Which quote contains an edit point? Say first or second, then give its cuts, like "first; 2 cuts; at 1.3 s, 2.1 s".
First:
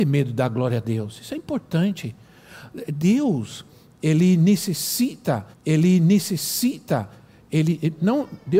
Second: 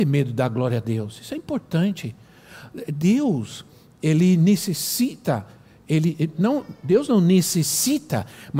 first; 1 cut; at 5.5 s